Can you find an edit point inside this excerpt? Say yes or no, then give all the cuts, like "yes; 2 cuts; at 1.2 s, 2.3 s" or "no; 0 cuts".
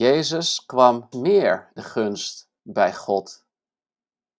yes; 3 cuts; at 1.1 s, 1.8 s, 2.6 s